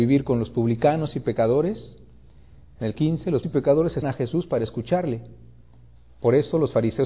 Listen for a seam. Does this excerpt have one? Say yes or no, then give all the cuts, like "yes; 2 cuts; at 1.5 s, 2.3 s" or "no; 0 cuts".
yes; 3 cuts; at 2.9 s, 3.4 s, 4.0 s